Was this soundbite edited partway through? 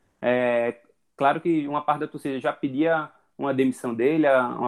no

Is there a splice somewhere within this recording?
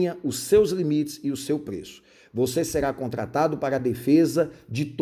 no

